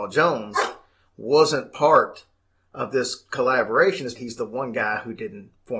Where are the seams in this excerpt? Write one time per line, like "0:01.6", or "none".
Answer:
0:04.2